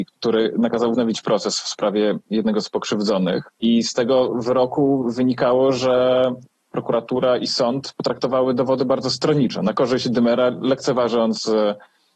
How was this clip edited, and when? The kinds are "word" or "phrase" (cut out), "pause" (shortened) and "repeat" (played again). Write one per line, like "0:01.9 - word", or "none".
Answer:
none

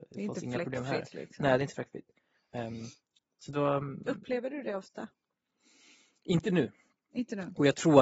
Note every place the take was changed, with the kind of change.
none

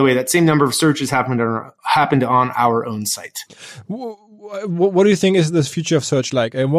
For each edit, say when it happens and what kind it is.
none

